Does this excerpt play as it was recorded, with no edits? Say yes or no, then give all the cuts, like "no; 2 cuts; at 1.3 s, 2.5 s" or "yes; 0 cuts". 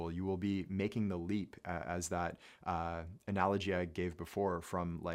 yes; 0 cuts